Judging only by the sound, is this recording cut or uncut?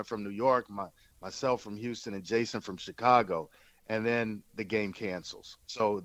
uncut